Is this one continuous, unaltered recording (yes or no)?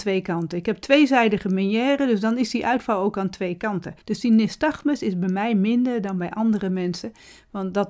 no